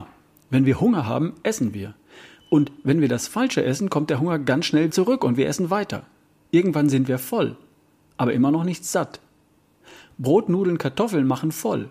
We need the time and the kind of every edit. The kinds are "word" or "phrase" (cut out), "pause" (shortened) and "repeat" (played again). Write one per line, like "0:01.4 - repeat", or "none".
0:04.9 - word